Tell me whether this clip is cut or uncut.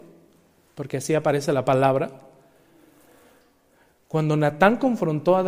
uncut